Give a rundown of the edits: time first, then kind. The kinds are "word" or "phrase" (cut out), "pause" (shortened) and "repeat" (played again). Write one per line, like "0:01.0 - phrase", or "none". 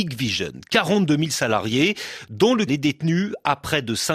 0:02.7 - word